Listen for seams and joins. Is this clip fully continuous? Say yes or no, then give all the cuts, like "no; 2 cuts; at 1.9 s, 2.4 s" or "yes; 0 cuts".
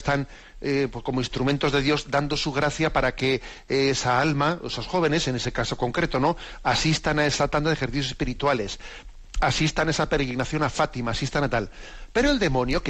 yes; 0 cuts